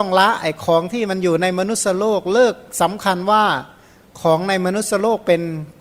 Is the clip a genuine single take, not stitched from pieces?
yes; 0 cuts

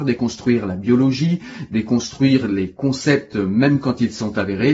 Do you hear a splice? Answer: no; 0 cuts

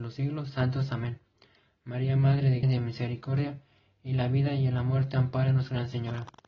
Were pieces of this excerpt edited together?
yes; 1 cut; at 2.6 s

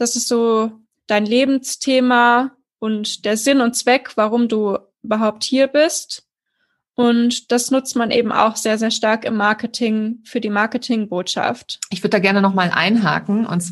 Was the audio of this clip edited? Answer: no; 0 cuts

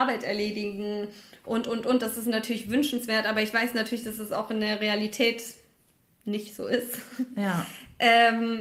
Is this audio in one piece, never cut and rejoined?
yes; 0 cuts

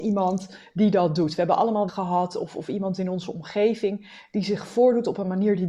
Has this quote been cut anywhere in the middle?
yes; 1 cut; at 1.9 s

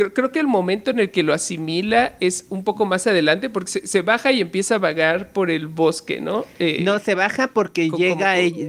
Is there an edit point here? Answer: no; 0 cuts

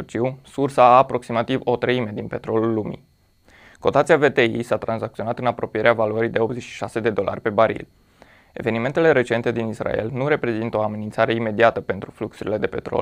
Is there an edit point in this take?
no; 0 cuts

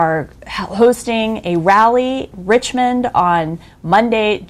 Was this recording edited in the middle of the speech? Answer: yes; 1 cut; at 2.3 s

